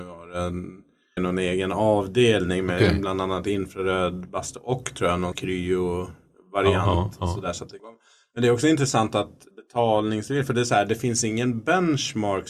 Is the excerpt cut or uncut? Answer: cut